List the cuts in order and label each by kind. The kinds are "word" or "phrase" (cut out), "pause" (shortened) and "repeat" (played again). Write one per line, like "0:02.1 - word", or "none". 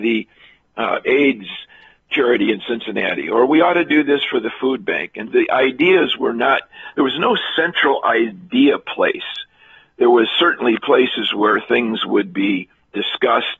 0:05.3 - word